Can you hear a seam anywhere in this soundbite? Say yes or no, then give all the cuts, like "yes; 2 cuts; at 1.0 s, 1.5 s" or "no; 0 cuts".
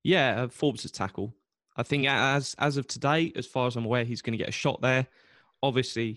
no; 0 cuts